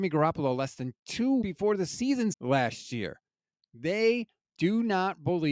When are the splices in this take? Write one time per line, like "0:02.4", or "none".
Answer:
0:01.4
0:02.3